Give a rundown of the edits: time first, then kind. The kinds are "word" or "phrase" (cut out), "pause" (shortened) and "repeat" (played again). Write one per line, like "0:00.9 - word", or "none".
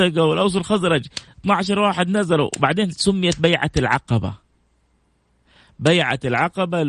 none

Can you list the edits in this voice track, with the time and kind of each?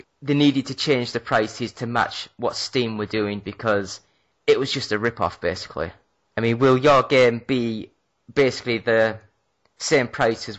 none

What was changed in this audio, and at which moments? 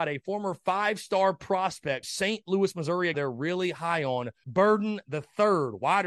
0:02.0 - word
0:03.1 - word
0:04.4 - word

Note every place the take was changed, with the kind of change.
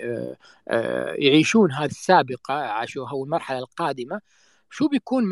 0:01.9 - word

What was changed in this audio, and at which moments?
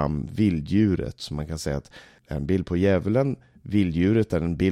0:02.2 - word

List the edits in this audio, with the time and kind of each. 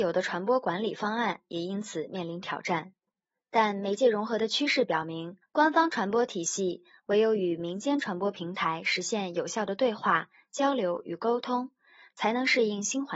0:05.4 - pause

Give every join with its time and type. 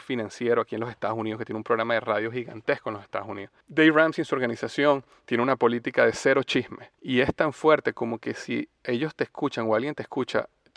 0:03.6 - pause
0:06.9 - pause

